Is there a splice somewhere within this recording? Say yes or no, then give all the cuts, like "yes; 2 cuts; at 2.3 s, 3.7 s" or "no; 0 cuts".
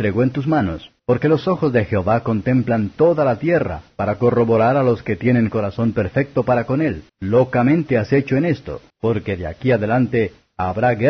yes; 3 cuts; at 1.0 s, 7.1 s, 8.9 s